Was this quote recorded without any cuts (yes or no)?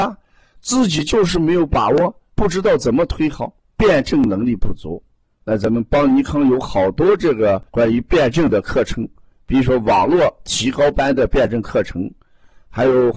no